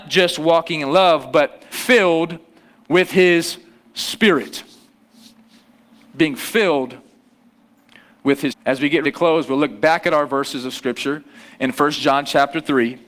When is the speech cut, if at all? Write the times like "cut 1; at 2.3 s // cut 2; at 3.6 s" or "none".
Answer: cut 1; at 1.7 s // cut 2; at 8.5 s // cut 3; at 9.0 s